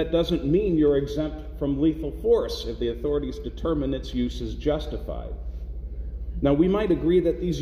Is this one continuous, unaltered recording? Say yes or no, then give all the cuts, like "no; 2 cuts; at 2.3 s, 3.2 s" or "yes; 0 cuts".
yes; 0 cuts